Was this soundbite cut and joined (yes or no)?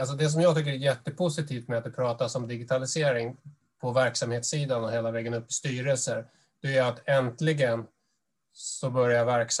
no